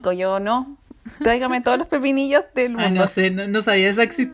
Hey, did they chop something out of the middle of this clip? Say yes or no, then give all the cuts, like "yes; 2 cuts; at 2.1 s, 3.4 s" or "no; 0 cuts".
no; 0 cuts